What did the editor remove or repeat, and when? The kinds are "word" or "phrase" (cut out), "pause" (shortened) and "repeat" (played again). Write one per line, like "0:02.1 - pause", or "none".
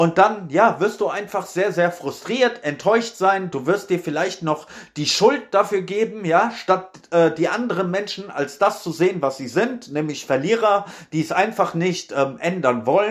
none